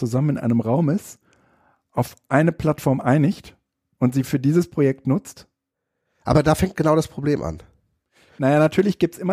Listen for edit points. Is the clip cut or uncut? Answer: uncut